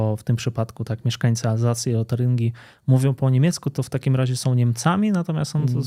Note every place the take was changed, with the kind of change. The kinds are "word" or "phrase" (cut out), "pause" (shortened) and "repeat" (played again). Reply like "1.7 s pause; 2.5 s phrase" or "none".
none